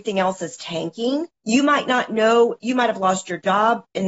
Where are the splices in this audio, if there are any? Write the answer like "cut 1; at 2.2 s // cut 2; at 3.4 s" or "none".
cut 1; at 1.4 s